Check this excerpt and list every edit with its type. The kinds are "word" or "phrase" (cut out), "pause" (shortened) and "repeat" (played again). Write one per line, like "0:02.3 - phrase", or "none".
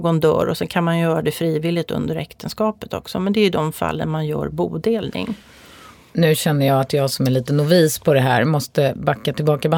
none

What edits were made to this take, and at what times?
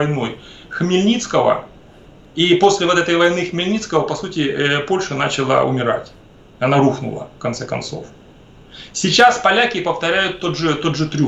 none

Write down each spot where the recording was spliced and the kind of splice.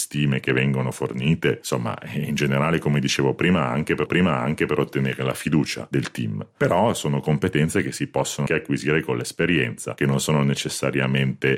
0:04.1 - repeat
0:08.5 - word

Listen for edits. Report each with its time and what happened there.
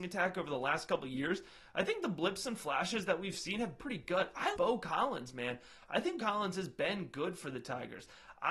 0:03.8 - word
0:04.5 - word
0:06.2 - word

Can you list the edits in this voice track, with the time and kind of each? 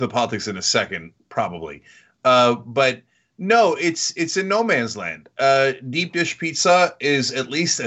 none

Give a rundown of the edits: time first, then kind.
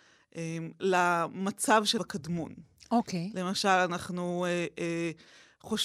0:02.0 - word

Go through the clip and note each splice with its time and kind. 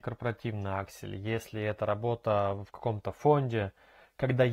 none

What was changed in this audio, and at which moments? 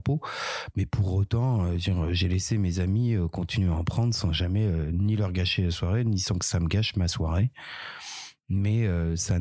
none

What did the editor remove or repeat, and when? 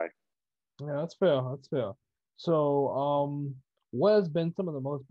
none

